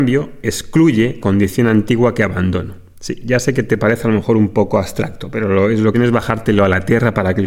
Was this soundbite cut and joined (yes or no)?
yes